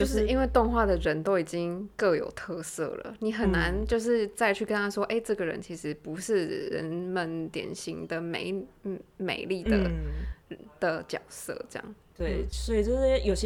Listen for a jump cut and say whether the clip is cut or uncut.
uncut